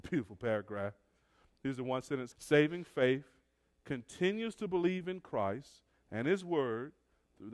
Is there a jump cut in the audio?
yes; 1 cut; at 2.3 s

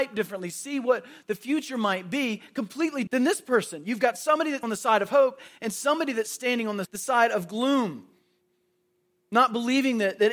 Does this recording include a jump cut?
yes; 3 cuts; at 3.1 s, 4.6 s, 6.9 s

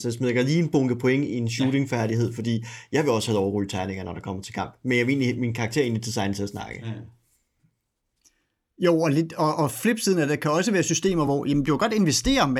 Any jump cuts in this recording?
no; 0 cuts

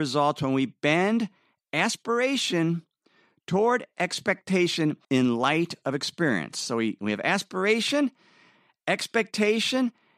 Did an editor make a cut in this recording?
yes; 1 cut; at 5.0 s

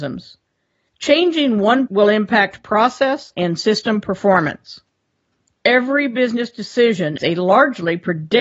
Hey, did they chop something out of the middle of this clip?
yes; 2 cuts; at 1.9 s, 7.2 s

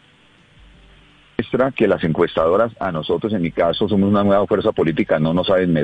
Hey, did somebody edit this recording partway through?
no; 0 cuts

